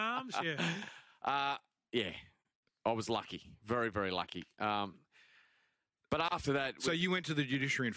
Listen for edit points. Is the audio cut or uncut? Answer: uncut